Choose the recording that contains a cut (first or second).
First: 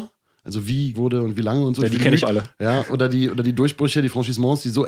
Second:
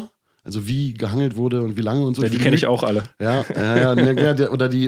first